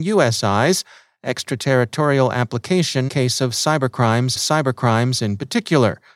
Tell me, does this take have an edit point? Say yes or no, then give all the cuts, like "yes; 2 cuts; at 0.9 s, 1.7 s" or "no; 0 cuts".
yes; 2 cuts; at 3.1 s, 4.4 s